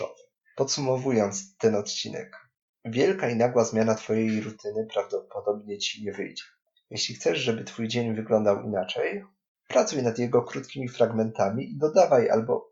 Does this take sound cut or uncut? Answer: uncut